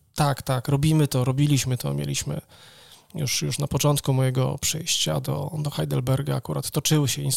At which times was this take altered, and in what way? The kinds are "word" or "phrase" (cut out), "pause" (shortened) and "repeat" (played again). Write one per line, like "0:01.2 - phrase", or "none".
none